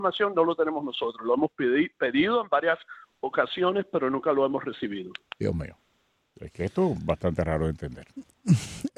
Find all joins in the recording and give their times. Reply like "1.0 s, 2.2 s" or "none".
none

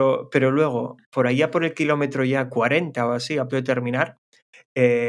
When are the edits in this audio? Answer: 3.5 s

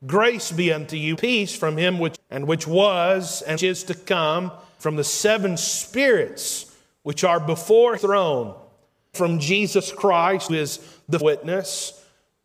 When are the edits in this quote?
1.1 s, 2.1 s, 3.6 s, 4.8 s, 8.0 s, 9.1 s, 10.5 s, 11.2 s

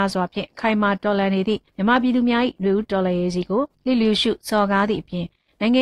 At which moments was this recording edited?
1.7 s, 3.7 s

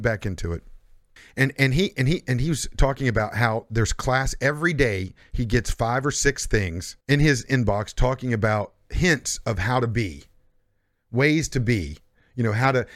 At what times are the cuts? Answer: 1.2 s, 7.0 s

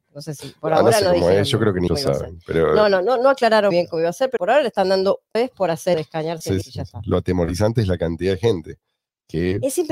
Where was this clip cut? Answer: 1.9 s, 3.7 s, 4.4 s, 5.3 s, 5.9 s, 6.6 s

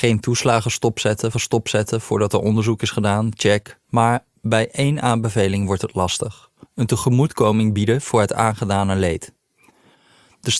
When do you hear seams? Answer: 1.3 s, 3.8 s, 6.6 s

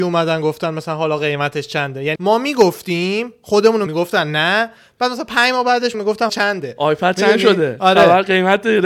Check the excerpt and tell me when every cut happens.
2.2 s, 3.9 s, 5.9 s, 6.3 s

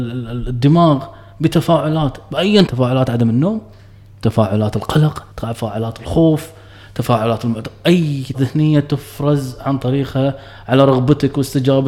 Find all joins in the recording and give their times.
2.7 s, 5.3 s, 8.3 s

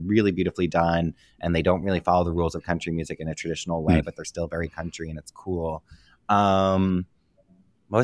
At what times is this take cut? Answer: none

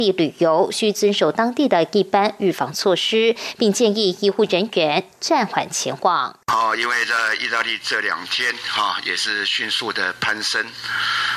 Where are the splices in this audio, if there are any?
6.4 s

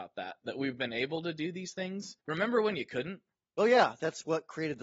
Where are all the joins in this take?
2.2 s

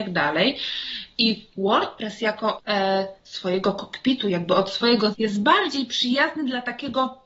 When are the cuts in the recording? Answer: 2.6 s, 5.1 s

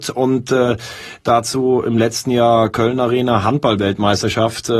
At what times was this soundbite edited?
none

